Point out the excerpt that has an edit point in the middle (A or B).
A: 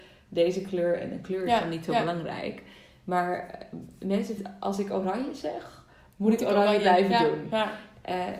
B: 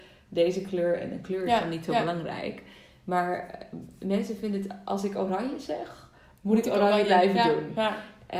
A